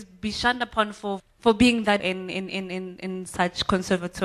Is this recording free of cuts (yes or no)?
no